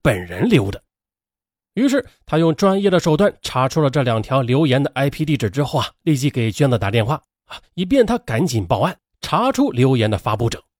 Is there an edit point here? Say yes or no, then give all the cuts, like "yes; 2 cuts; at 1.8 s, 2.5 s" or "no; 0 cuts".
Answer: no; 0 cuts